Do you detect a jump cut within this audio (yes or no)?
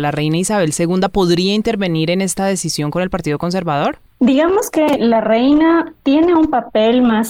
no